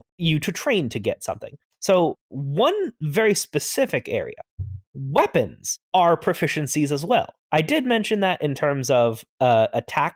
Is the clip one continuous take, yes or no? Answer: yes